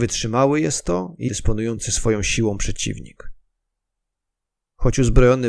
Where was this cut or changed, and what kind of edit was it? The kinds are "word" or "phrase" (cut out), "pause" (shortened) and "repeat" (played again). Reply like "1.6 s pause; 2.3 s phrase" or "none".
1.3 s word